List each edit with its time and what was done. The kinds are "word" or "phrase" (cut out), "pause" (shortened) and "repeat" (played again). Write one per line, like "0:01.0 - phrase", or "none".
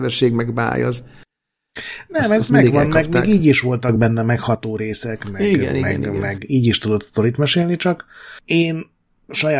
none